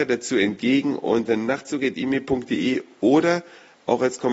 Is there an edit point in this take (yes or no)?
no